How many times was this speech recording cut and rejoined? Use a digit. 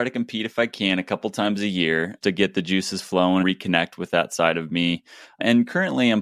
2